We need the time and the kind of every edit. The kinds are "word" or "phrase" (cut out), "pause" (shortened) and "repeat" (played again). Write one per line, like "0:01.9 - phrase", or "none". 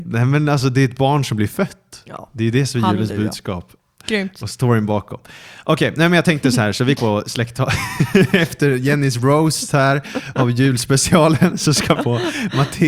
0:07.0 - word
0:12.0 - phrase

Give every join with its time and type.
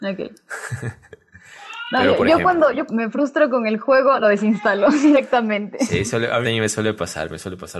0:02.9 - word
0:06.4 - word

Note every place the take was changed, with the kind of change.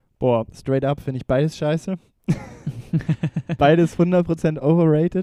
none

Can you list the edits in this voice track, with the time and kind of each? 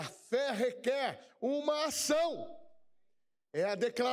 none

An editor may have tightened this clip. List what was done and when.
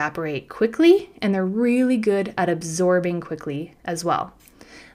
none

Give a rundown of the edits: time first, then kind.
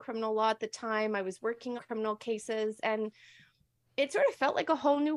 0:01.8 - word

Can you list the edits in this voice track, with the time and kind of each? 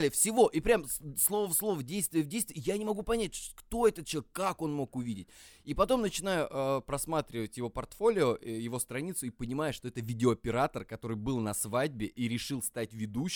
none

